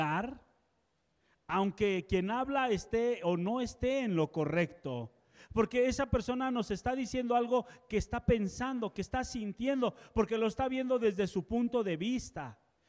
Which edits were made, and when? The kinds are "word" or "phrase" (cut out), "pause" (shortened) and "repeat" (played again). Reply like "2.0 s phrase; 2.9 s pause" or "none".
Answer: none